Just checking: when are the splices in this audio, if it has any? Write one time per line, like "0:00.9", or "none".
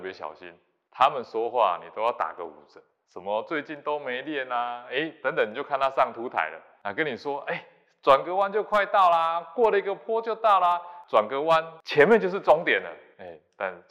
none

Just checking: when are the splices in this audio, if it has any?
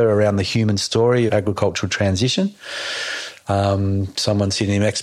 0:01.3

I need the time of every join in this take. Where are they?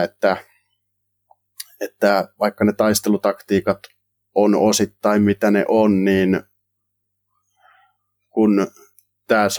none

